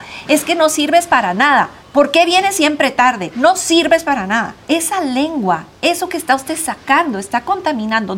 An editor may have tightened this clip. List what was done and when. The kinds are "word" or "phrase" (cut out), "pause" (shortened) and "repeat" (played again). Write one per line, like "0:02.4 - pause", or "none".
0:01.8 - pause
0:04.6 - pause